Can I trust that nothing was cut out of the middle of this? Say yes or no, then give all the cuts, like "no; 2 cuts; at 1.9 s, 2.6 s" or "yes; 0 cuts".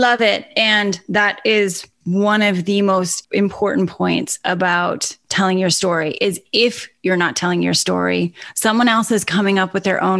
yes; 0 cuts